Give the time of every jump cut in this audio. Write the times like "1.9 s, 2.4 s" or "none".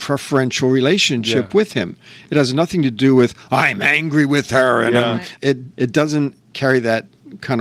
5.7 s